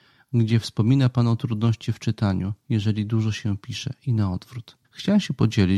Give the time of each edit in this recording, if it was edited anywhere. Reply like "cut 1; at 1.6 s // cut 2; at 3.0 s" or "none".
cut 1; at 4.8 s